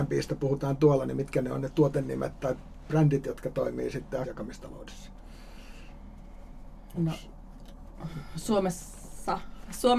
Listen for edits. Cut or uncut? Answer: cut